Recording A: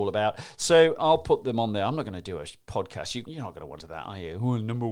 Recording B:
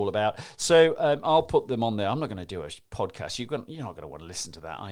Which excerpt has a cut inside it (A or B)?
A